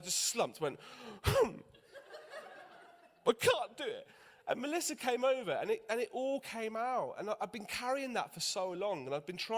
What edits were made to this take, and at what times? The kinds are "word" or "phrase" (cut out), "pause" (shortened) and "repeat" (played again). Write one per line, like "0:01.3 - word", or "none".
none